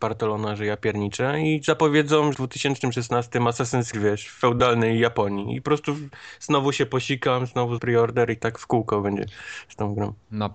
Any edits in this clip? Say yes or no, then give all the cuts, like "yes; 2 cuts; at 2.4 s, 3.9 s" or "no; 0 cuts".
yes; 3 cuts; at 2.3 s, 3.9 s, 7.8 s